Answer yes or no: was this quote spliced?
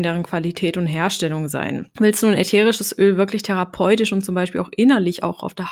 no